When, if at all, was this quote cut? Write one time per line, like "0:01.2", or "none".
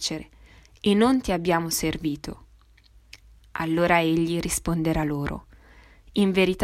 none